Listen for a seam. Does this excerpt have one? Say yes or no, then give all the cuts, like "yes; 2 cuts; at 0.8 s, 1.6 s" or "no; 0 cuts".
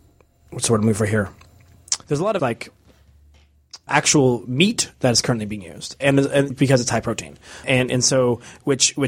yes; 7 cuts; at 2.0 s, 2.4 s, 3.9 s, 4.9 s, 6.0 s, 6.5 s, 7.6 s